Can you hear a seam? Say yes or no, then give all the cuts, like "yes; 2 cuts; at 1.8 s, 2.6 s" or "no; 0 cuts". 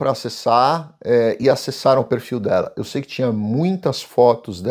no; 0 cuts